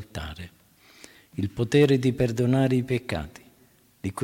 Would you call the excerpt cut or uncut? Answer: uncut